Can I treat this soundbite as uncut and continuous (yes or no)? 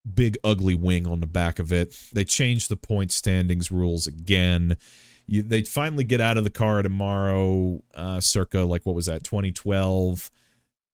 yes